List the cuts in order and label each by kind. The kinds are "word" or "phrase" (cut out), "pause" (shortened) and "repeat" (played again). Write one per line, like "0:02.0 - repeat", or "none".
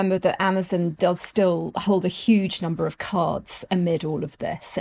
none